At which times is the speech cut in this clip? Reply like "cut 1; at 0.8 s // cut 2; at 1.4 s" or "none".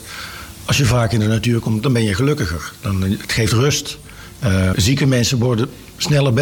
cut 1; at 4.7 s